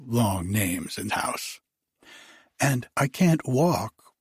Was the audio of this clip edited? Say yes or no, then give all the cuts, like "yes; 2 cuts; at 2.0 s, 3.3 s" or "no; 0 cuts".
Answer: yes; 2 cuts; at 1.1 s, 2.9 s